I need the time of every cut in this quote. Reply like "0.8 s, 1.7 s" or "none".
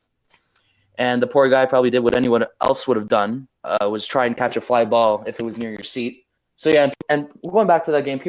3.6 s, 6.4 s, 7.0 s